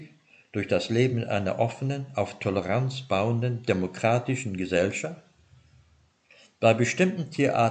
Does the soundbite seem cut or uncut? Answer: uncut